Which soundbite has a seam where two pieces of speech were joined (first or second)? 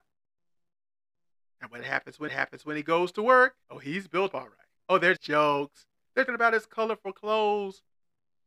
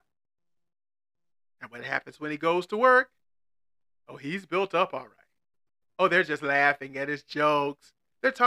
first